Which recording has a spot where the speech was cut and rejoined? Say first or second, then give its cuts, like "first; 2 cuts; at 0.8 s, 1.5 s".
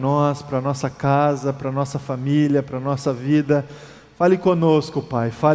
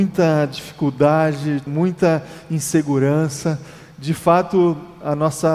second; 1 cut; at 1.7 s